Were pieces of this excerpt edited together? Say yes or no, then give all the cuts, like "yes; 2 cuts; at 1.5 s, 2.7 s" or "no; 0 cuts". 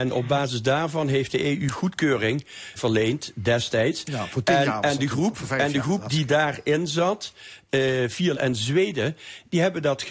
yes; 2 cuts; at 2.8 s, 8.3 s